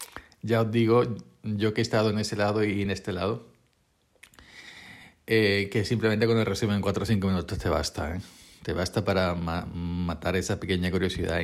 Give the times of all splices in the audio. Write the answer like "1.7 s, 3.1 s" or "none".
none

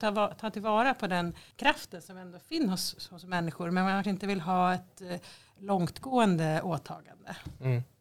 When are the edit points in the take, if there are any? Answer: 1.5 s, 4.0 s

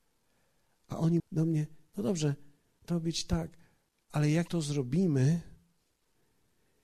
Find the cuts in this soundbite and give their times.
1.2 s, 2.9 s, 4.5 s

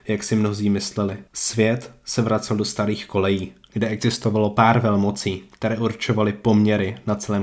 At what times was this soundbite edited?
1.3 s

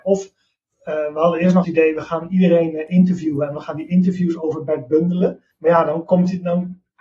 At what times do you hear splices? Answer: 1.6 s, 5.5 s

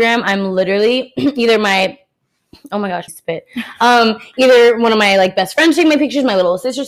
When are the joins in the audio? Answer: 3.1 s

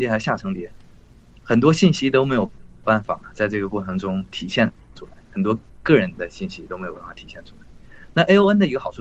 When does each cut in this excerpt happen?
none

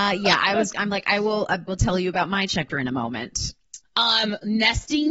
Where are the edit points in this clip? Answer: 1.7 s, 2.7 s, 3.8 s

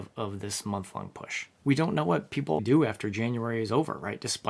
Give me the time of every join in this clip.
2.6 s

